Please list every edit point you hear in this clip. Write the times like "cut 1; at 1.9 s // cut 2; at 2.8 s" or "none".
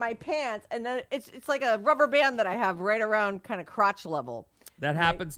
none

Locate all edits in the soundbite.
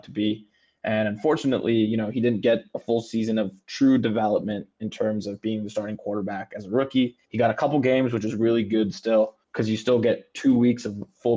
cut 1; at 7.2 s // cut 2; at 9.4 s

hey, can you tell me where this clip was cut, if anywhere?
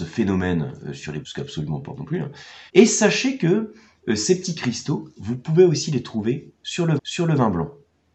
cut 1; at 1.2 s // cut 2; at 2.0 s // cut 3; at 2.7 s // cut 4; at 7.0 s

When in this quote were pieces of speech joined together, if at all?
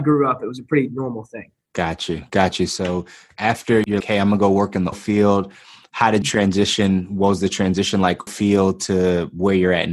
cut 1; at 4.0 s // cut 2; at 4.9 s // cut 3; at 6.2 s // cut 4; at 8.3 s

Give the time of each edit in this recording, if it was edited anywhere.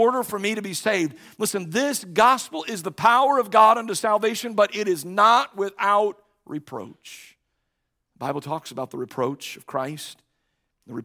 none

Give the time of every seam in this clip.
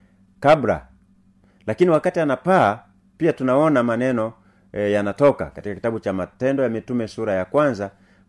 none

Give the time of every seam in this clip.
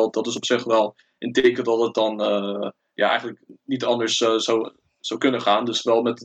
none

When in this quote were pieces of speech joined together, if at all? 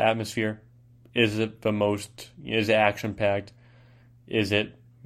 none

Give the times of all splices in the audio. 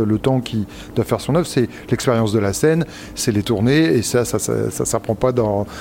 none

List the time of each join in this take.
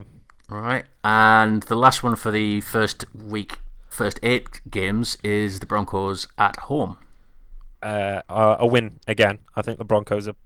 cut 1; at 3.9 s // cut 2; at 7.7 s

